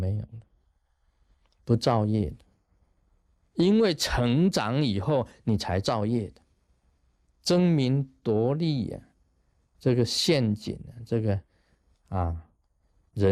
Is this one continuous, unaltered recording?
yes; 0 cuts

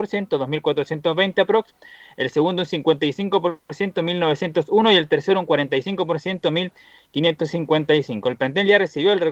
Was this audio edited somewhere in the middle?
no; 0 cuts

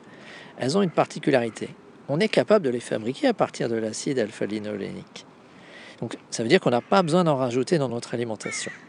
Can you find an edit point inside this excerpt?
no; 0 cuts

